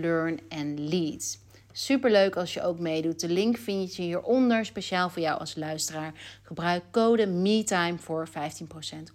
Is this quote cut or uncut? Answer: uncut